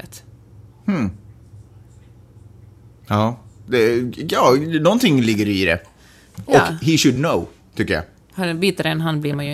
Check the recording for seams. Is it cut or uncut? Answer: uncut